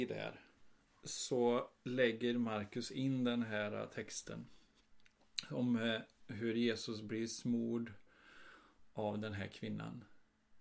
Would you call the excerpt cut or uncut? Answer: uncut